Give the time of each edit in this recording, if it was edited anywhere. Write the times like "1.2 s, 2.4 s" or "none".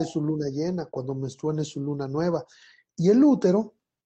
none